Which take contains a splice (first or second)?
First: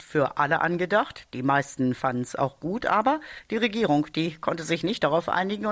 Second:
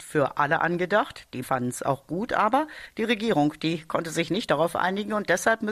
second